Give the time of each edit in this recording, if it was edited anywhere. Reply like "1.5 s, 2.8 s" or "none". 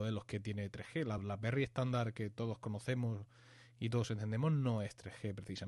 none